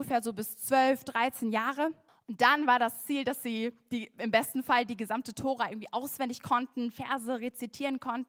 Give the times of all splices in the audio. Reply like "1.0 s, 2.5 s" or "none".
2.1 s